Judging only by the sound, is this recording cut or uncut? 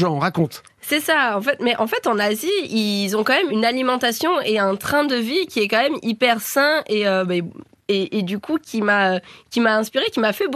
cut